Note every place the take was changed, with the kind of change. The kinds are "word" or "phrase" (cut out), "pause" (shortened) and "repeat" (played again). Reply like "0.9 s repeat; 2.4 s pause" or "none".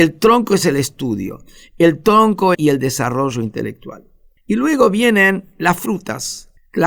2.5 s phrase

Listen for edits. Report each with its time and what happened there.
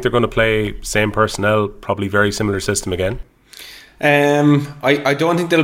none

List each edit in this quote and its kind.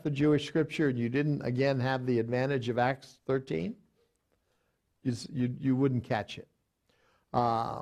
none

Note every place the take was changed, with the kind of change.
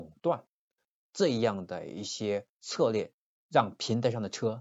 2.5 s pause; 3.3 s pause

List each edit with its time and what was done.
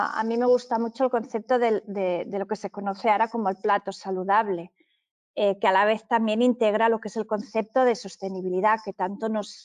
none

